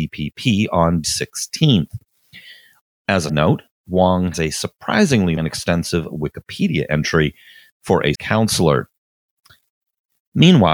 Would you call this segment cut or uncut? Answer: cut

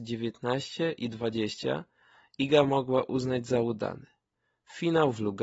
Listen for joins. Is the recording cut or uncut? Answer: uncut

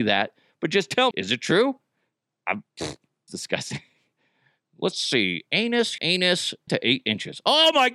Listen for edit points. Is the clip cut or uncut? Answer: cut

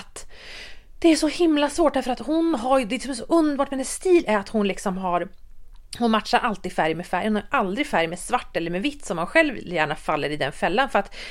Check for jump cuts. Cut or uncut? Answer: uncut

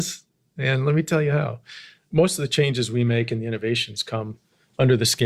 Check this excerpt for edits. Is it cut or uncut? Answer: uncut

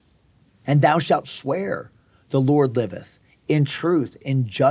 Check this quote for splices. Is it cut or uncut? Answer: uncut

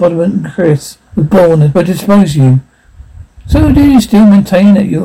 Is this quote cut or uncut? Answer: cut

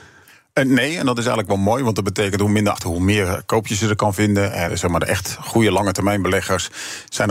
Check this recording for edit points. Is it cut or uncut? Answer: cut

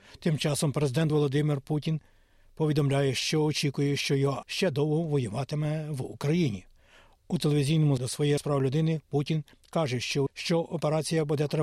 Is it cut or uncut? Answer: cut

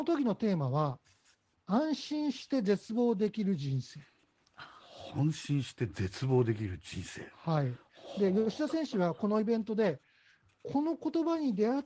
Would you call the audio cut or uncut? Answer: uncut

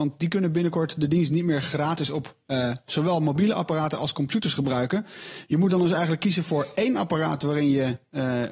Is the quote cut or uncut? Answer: uncut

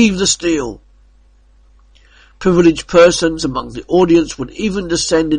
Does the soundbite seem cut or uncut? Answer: uncut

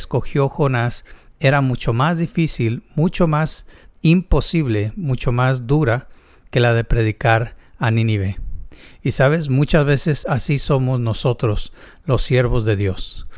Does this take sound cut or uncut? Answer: uncut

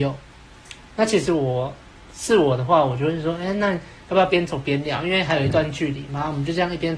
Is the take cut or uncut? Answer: uncut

